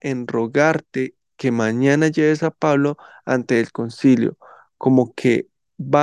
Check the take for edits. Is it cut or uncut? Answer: uncut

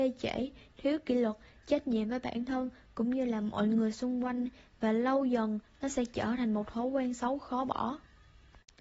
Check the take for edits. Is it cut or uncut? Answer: uncut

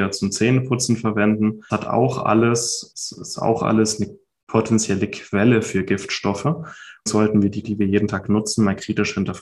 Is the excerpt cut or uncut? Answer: cut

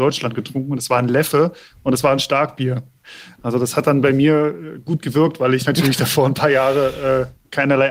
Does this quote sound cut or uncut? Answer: uncut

